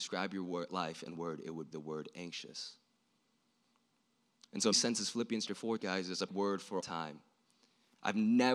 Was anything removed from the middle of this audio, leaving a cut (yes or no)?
yes